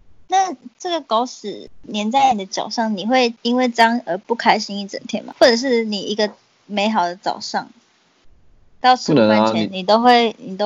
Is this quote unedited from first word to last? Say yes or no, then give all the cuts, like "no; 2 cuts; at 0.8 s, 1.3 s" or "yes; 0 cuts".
yes; 0 cuts